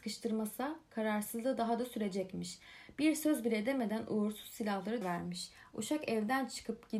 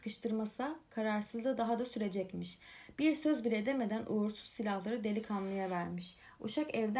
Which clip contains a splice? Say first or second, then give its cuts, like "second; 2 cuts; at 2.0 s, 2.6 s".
first; 1 cut; at 5.0 s